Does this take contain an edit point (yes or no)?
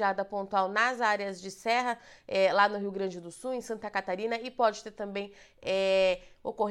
no